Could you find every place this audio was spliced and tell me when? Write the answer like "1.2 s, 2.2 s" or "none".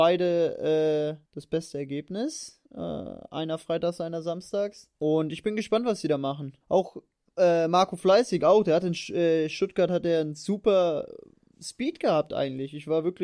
1.3 s, 2.7 s, 4.9 s, 6.6 s